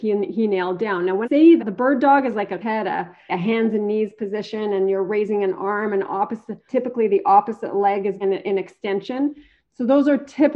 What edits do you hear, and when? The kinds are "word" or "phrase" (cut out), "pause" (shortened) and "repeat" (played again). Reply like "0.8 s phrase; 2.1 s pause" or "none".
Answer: 1.2 s word; 1.6 s word; 2.6 s word; 3.3 s word; 6.7 s word; 8.2 s word